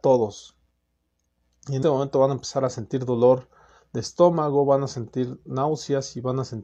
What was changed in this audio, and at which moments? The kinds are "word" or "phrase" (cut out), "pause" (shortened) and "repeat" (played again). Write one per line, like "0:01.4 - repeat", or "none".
0:01.8 - word